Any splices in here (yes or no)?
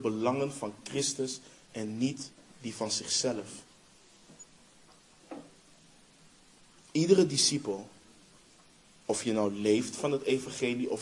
no